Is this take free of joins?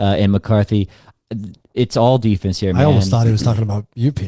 yes; 0 cuts

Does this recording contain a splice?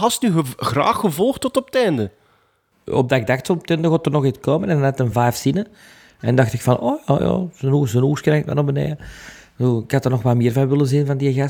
no; 0 cuts

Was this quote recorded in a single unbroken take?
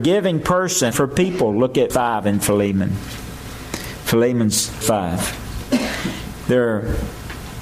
no; 3 cuts; at 0.9 s, 1.9 s, 4.8 s

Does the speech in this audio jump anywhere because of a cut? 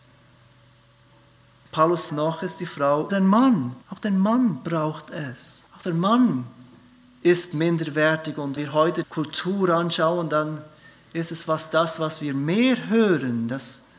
yes; 7 cuts; at 2.1 s, 3.1 s, 3.8 s, 5.7 s, 7.5 s, 8.6 s, 9.0 s

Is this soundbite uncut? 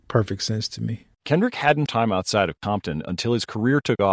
no; 2 cuts; at 1.1 s, 1.9 s

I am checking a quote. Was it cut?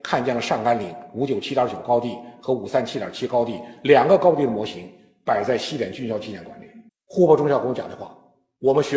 yes; 1 cut; at 6.9 s

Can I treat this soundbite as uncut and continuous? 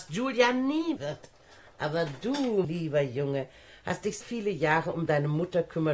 no; 3 cuts; at 1.0 s, 2.6 s, 4.2 s

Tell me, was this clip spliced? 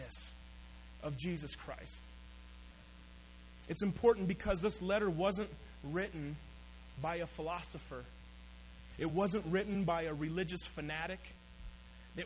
no; 0 cuts

